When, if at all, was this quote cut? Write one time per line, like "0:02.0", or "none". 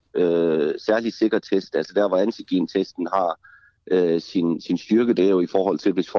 none